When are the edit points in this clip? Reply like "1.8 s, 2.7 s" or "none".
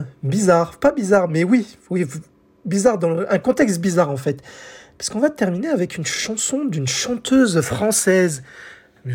none